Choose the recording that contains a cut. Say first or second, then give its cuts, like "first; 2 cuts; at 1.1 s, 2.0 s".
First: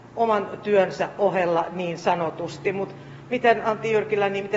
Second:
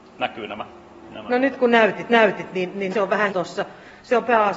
second; 3 cuts; at 2.1 s, 2.9 s, 3.3 s